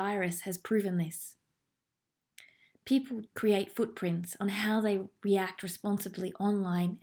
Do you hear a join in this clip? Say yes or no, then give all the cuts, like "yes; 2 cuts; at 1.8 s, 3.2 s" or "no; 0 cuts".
yes; 1 cut; at 3.3 s